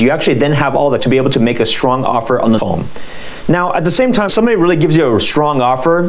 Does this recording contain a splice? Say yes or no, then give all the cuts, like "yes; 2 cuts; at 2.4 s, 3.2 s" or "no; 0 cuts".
yes; 3 cuts; at 1.0 s, 2.6 s, 4.3 s